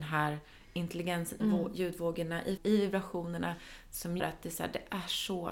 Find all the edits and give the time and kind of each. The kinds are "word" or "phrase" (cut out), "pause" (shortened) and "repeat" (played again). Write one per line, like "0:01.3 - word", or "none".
0:01.4 - word
0:02.6 - word
0:04.2 - word

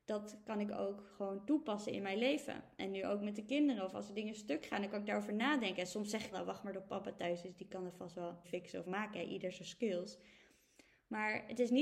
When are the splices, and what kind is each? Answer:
0:06.3 - word
0:08.4 - word
0:08.8 - word

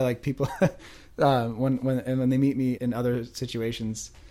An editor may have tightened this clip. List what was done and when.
0:02.8 - word

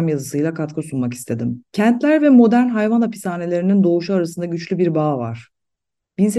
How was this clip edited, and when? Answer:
0:01.7 - pause

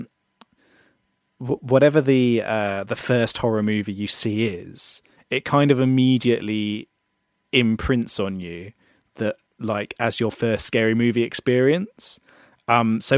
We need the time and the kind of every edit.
none

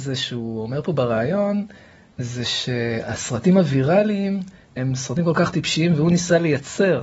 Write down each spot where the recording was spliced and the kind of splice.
none

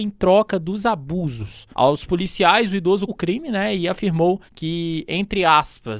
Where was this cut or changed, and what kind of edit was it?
0:01.7 - pause
0:03.1 - word
0:04.5 - pause

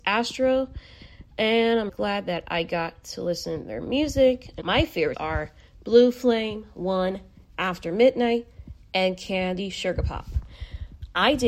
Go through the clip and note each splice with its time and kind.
0:01.9 - word
0:04.6 - word
0:05.1 - word

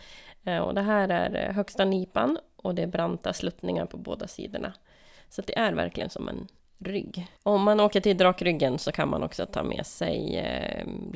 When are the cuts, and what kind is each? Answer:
none

